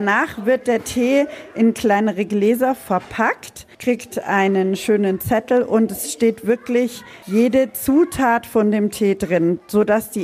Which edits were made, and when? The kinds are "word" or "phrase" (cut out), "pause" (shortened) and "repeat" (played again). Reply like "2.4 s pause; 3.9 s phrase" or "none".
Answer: none